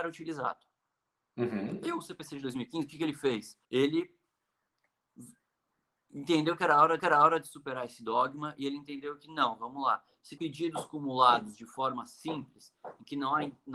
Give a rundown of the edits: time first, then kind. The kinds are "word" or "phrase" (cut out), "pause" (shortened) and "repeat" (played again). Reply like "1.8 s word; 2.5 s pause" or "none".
3.6 s pause; 7.0 s repeat; 10.4 s word